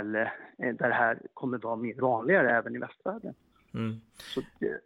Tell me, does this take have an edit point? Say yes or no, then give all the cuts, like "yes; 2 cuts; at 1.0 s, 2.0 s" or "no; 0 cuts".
yes; 1 cut; at 2.0 s